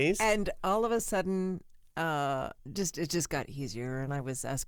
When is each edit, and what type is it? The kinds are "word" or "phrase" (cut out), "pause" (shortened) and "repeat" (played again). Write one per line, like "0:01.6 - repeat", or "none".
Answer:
0:02.6 - pause